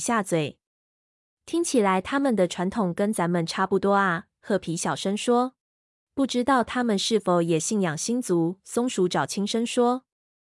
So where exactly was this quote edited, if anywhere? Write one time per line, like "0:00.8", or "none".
0:05.6